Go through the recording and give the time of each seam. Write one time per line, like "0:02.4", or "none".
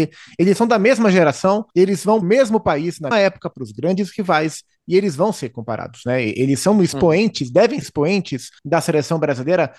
0:01.7
0:02.2
0:03.1
0:07.8
0:08.6